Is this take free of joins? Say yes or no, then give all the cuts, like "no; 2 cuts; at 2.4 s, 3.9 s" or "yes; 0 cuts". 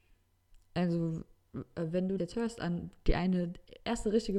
no; 1 cut; at 2.2 s